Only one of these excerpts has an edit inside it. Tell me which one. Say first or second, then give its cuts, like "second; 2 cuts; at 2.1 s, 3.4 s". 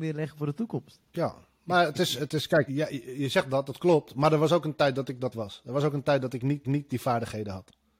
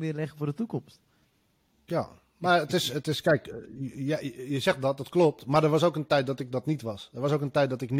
first; 4 cuts; at 1.1 s, 2.7 s, 5.3 s, 6.6 s